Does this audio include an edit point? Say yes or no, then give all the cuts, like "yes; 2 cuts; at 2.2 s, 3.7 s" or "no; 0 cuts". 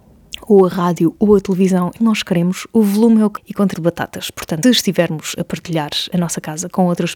yes; 5 cuts; at 2.0 s, 3.4 s, 3.7 s, 4.6 s, 6.1 s